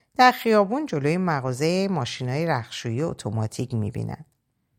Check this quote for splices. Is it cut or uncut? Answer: uncut